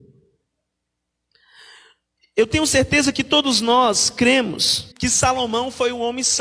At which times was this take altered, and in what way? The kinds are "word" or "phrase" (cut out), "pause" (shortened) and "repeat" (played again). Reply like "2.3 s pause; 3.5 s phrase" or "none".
4.9 s pause